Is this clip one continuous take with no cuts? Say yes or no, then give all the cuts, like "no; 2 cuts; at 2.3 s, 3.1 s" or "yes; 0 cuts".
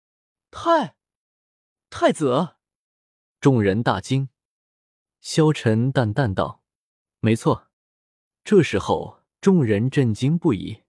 no; 1 cut; at 7.7 s